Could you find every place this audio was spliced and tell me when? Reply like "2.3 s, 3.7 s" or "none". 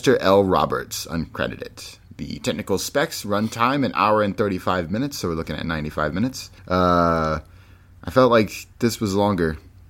6.6 s